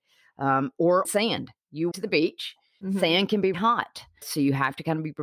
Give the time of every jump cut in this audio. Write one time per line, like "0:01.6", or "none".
0:01.0
0:01.9
0:03.5
0:04.2